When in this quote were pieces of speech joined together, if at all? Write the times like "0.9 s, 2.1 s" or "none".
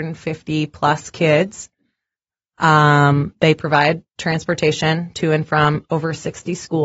none